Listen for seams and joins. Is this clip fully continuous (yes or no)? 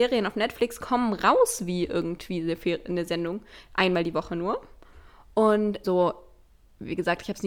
no